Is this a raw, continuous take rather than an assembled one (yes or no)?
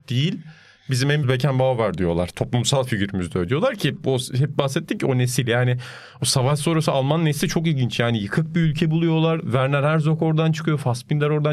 no